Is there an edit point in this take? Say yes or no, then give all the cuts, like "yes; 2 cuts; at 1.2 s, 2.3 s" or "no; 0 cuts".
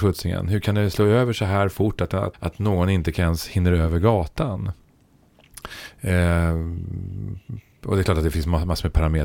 yes; 1 cut; at 2.3 s